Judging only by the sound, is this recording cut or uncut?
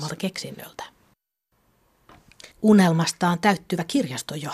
cut